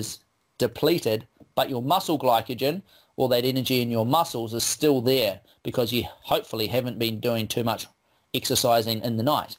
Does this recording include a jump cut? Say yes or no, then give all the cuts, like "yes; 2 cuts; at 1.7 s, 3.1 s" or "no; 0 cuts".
no; 0 cuts